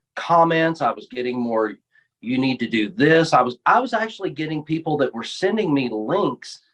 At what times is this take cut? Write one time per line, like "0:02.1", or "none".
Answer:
none